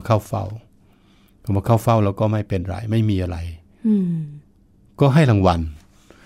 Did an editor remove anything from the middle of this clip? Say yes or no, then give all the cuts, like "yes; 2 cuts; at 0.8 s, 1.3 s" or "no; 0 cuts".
no; 0 cuts